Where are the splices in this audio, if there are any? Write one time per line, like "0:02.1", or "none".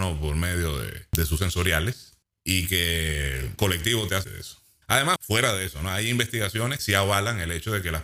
0:01.4
0:03.6
0:04.2
0:05.2
0:06.8